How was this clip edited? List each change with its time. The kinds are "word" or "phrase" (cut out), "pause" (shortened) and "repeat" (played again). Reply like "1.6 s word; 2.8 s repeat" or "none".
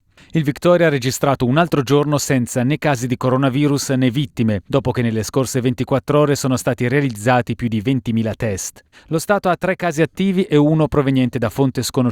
4.7 s pause; 8.9 s pause